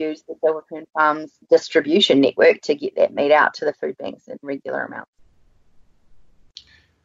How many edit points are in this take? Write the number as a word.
one